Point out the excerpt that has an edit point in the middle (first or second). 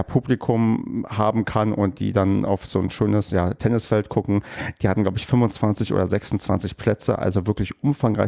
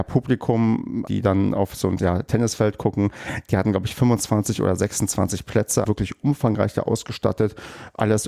second